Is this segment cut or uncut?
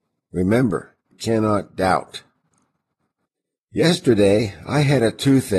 cut